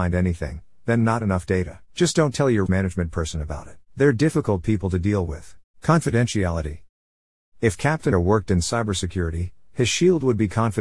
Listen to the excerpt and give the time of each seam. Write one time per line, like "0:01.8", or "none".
0:01.9
0:02.7
0:03.9
0:05.7
0:08.1